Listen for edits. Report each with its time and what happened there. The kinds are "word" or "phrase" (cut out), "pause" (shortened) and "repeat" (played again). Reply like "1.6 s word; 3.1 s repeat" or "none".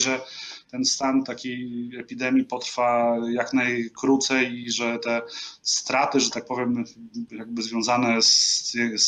none